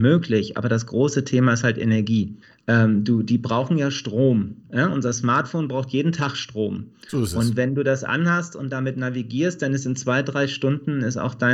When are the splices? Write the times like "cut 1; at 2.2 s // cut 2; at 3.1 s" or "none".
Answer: cut 1; at 2.4 s // cut 2; at 4.6 s

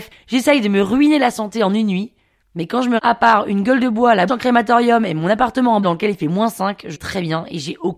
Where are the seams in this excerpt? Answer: cut 1; at 3.0 s // cut 2; at 4.3 s // cut 3; at 5.8 s // cut 4; at 6.9 s

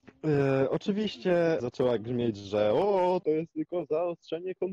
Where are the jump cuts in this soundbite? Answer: cut 1; at 1.6 s

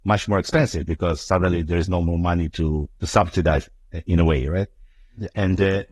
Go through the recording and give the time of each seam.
cut 1; at 3.0 s

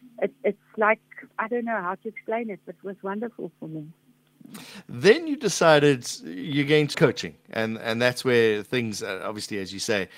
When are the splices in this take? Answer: cut 1; at 1.3 s // cut 2; at 6.9 s

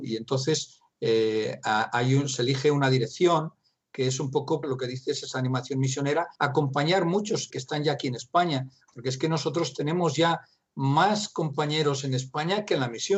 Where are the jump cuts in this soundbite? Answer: cut 1; at 4.6 s // cut 2; at 6.3 s // cut 3; at 7.5 s

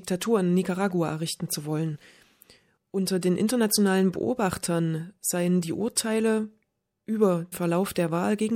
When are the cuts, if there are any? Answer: cut 1; at 7.5 s

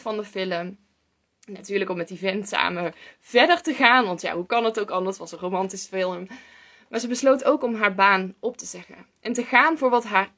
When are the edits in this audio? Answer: none

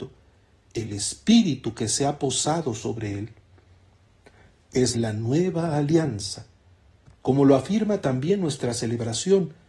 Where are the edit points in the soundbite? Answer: cut 1; at 4.9 s

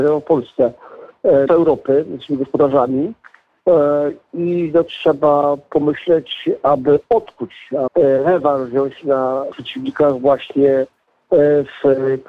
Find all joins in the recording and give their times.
cut 1; at 1.5 s // cut 2; at 4.9 s // cut 3; at 7.9 s // cut 4; at 9.5 s

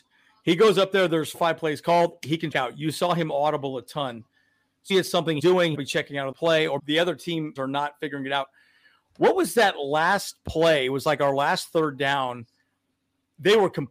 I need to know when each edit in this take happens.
cut 1; at 1.3 s // cut 2; at 2.5 s // cut 3; at 4.9 s // cut 4; at 5.4 s // cut 5; at 5.7 s // cut 6; at 6.3 s // cut 7; at 6.8 s // cut 8; at 7.6 s

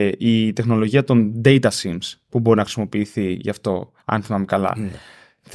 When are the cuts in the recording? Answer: cut 1; at 4.0 s

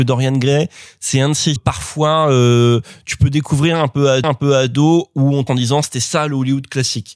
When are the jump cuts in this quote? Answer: cut 1; at 1.6 s // cut 2; at 4.2 s // cut 3; at 5.5 s

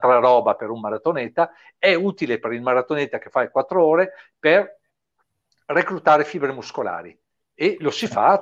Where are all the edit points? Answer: none

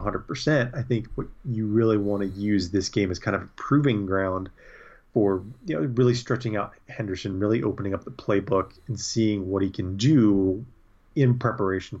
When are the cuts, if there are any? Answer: none

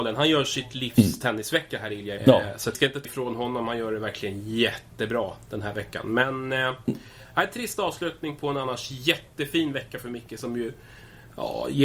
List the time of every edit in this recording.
cut 1; at 2.2 s // cut 2; at 2.7 s // cut 3; at 3.0 s

